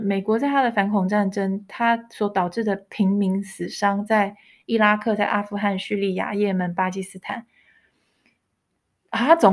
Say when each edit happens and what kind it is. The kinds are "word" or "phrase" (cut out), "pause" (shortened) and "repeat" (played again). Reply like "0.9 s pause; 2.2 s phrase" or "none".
none